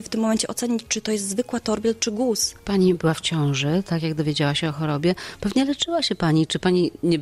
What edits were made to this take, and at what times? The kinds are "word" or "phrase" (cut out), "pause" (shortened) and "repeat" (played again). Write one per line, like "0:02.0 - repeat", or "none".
none